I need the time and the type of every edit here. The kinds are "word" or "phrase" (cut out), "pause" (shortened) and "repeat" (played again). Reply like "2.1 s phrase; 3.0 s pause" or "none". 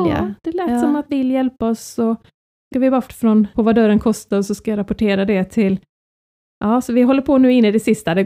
1.1 s word; 2.7 s word; 3.1 s word; 3.5 s word